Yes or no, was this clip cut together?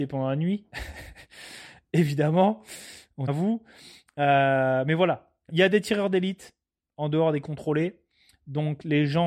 yes